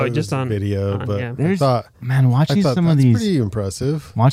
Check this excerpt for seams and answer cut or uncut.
uncut